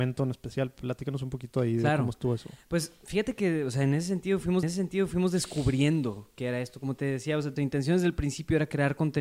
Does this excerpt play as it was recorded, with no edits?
no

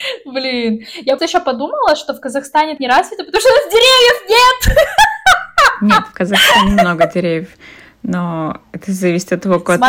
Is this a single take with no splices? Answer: no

